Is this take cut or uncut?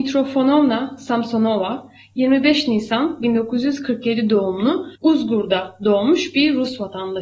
cut